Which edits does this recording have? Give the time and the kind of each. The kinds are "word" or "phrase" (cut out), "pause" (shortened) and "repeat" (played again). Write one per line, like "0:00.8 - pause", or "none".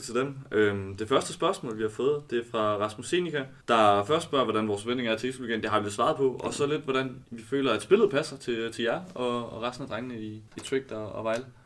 0:03.6 - pause
0:07.2 - pause
0:10.5 - pause